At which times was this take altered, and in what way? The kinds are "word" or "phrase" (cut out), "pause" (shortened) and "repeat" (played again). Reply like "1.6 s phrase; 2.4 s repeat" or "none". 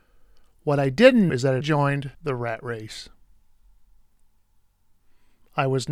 1.3 s word; 1.6 s word; 2.1 s pause